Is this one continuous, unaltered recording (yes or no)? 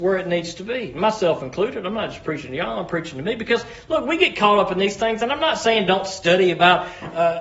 yes